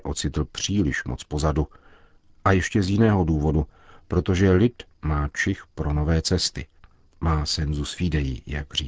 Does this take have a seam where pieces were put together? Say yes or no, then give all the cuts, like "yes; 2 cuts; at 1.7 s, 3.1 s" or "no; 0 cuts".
no; 0 cuts